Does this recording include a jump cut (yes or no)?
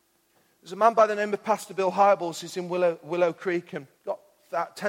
yes